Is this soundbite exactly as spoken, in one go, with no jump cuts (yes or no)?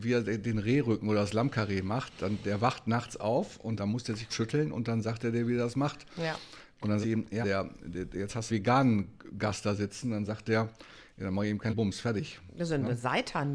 no